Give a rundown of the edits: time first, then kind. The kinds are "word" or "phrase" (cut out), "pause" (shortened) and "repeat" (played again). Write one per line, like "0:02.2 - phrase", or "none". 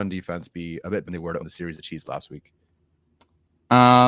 0:01.1 - word
0:01.4 - word
0:01.7 - word